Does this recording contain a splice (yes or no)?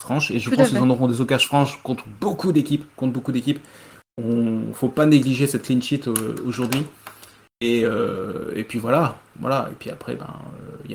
no